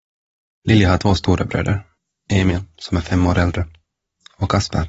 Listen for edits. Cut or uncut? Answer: cut